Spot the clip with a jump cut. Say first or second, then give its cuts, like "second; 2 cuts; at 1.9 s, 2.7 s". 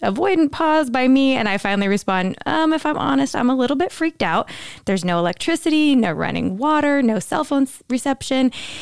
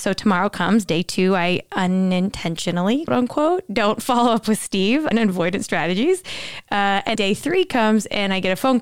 second; 3 cuts; at 3.1 s, 5.1 s, 7.1 s